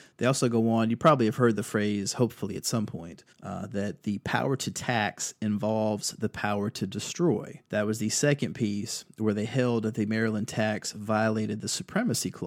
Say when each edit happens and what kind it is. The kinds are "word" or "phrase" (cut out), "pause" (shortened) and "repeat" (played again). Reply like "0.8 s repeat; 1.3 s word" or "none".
3.3 s pause; 7.6 s pause